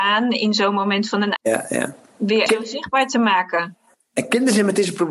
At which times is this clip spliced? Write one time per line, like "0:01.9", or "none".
0:01.4
0:02.5